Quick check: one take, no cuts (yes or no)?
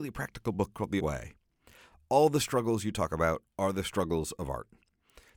no